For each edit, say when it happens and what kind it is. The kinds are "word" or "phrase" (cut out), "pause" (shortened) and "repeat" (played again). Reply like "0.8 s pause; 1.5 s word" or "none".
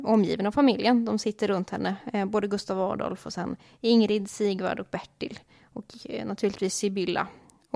none